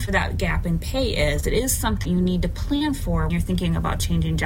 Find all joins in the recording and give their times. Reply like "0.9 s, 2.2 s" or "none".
2.0 s, 3.3 s